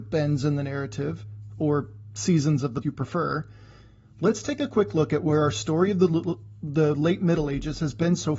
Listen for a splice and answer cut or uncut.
cut